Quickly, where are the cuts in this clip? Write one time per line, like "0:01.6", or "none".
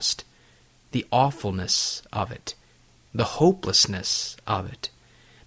none

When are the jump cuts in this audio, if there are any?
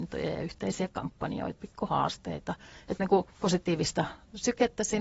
0:01.6
0:03.0
0:03.3

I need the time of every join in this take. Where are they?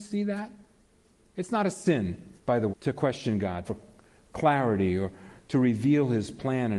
0:02.4
0:02.7
0:03.6

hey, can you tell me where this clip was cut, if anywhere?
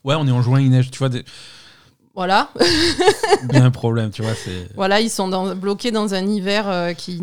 0:03.5

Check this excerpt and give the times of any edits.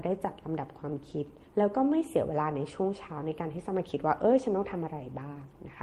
0:01.5

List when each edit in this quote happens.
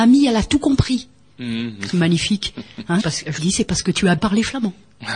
0:03.0
0:03.4
0:04.2

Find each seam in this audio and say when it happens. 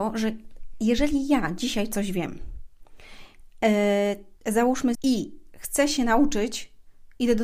0:04.4
0:04.9

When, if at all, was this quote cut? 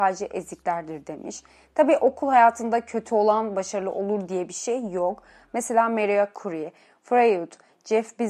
none

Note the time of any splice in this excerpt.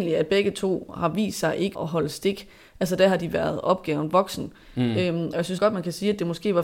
0:01.7
0:05.6

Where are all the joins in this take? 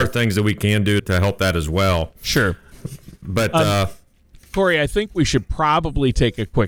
0:01.0

